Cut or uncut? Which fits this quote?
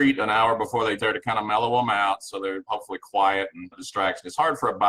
cut